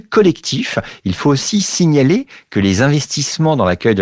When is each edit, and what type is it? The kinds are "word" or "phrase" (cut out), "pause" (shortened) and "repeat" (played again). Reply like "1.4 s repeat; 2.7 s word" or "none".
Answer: none